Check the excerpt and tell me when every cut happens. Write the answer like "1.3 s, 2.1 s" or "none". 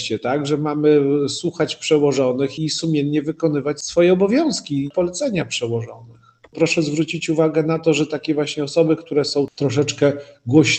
2.6 s